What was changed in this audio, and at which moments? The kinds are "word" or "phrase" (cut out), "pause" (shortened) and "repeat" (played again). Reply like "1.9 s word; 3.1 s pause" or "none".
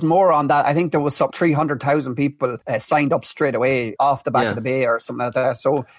1.3 s word; 2.6 s pause; 4.0 s word